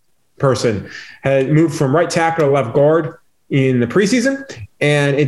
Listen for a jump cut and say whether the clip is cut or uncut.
uncut